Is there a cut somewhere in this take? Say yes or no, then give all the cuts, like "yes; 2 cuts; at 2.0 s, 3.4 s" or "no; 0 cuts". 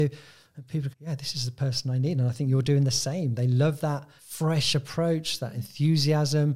yes; 2 cuts; at 0.9 s, 4.2 s